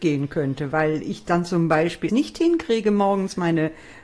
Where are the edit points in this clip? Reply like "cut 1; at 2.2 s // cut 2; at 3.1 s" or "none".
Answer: cut 1; at 2.1 s